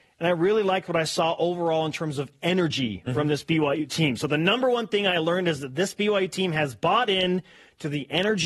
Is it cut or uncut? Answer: uncut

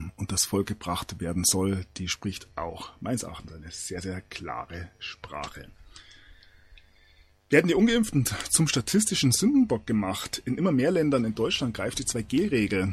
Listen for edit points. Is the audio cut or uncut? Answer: uncut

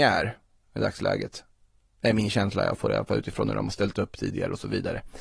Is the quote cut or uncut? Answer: uncut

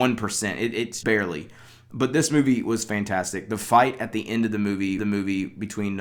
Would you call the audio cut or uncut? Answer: cut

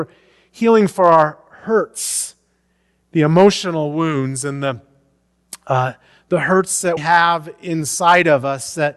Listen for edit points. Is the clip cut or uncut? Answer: cut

